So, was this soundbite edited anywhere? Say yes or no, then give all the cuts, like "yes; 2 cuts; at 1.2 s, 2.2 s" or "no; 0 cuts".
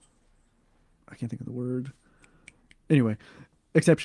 no; 0 cuts